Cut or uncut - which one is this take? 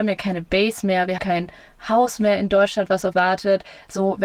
cut